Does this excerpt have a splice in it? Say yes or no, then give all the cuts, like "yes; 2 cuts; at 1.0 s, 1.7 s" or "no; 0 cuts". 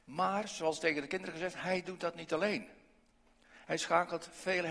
no; 0 cuts